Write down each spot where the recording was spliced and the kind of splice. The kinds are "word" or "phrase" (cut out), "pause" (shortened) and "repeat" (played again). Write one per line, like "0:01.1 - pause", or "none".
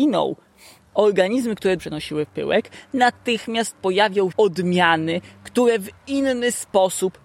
0:01.8 - word
0:04.3 - word